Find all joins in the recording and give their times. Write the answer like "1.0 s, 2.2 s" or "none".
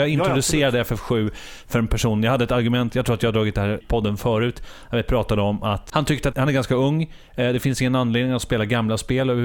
3.8 s, 5.9 s, 6.3 s